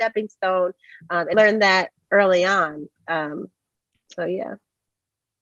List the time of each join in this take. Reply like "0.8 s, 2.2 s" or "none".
1.3 s